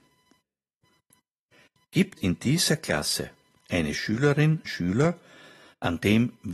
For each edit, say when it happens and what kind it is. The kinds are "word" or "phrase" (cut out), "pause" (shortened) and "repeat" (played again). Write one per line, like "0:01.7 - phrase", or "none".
0:02.2 - word
0:04.7 - word